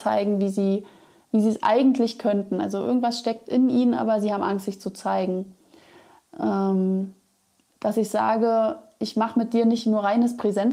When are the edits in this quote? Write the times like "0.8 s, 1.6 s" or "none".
none

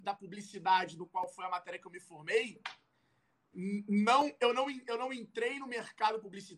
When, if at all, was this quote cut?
none

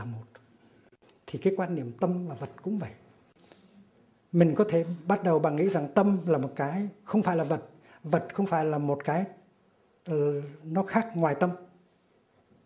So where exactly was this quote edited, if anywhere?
none

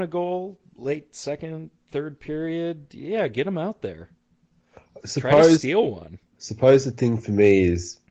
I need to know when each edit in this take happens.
6.3 s

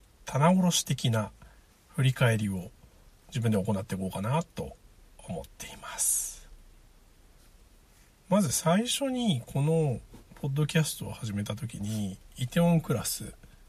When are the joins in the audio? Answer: none

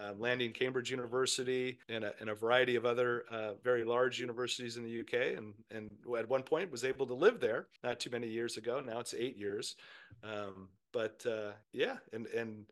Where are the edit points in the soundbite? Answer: 1.8 s, 7.8 s, 11.6 s

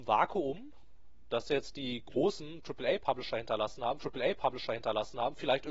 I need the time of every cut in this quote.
4.0 s

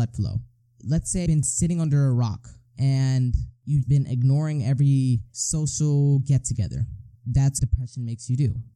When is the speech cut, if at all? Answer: 1.3 s, 3.8 s, 7.6 s

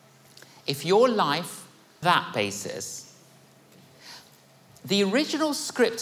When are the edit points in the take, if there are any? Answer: 2.0 s

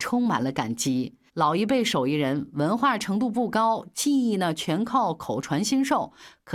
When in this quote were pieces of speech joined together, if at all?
1.3 s

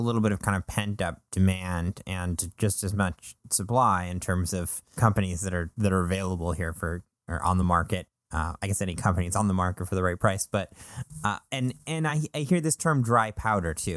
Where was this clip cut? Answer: none

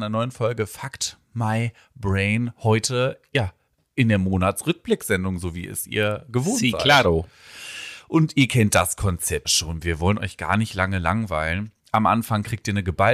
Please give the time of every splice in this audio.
9.4 s

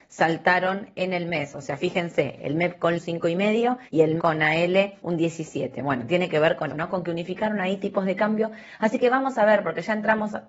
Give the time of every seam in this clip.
3.0 s, 3.9 s, 4.2 s, 5.0 s, 6.7 s

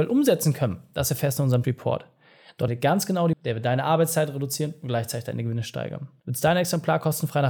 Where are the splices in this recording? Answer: 1.6 s, 2.7 s, 3.3 s

